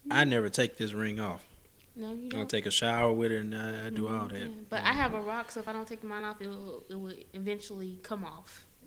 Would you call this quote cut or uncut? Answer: uncut